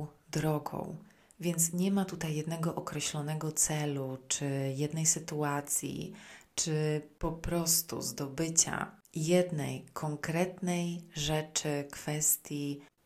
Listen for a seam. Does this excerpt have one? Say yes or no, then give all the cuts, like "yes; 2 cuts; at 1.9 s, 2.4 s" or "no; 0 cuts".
no; 0 cuts